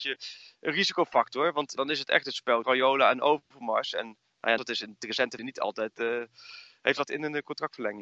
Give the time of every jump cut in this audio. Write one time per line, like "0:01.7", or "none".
0:01.8
0:02.6
0:04.6
0:05.4
0:07.0